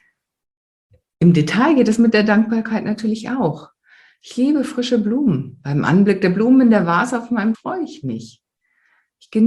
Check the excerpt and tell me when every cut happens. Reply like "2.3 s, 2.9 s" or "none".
7.5 s